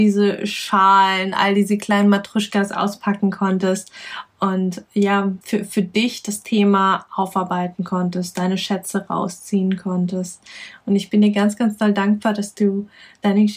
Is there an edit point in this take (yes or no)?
yes